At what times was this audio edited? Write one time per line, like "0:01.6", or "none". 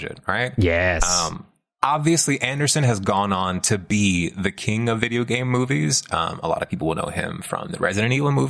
none